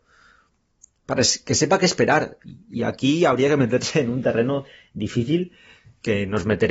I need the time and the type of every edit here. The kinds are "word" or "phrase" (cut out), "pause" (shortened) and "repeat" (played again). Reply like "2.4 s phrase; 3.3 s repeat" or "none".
none